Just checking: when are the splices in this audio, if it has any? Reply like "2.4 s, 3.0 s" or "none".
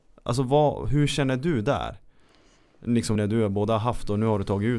3.2 s